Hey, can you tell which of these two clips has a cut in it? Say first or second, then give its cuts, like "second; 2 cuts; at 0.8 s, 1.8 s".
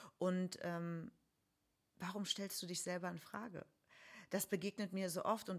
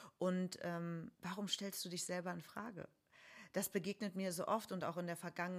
second; 1 cut; at 1.1 s